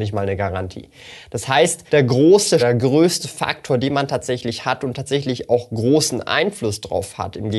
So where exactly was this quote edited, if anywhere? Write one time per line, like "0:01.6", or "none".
0:01.9
0:02.6